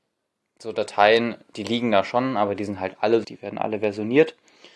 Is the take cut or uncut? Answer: cut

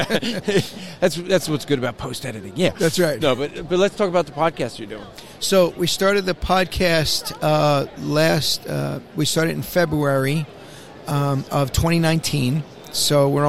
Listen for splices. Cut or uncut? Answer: uncut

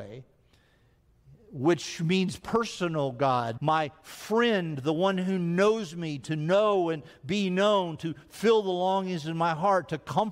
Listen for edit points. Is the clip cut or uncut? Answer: cut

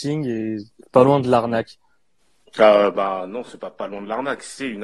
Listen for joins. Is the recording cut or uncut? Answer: uncut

